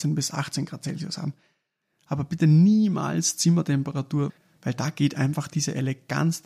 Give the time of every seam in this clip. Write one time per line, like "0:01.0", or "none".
none